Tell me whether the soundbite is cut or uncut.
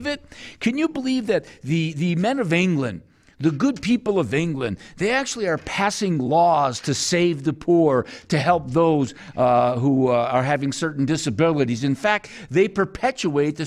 uncut